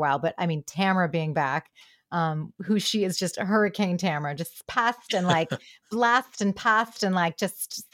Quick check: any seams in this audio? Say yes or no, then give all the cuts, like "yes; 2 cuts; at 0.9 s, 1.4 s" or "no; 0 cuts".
yes; 1 cut; at 2.6 s